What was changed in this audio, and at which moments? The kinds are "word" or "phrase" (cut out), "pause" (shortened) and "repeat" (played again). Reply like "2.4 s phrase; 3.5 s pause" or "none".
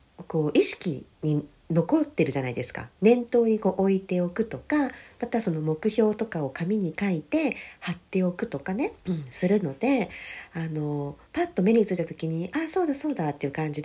1.1 s pause; 9.0 s pause; 11.3 s pause